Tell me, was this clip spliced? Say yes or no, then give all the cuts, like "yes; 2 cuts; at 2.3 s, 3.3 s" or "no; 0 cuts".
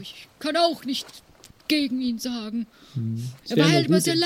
no; 0 cuts